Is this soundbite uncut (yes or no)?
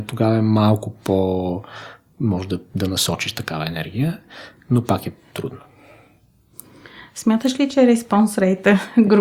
yes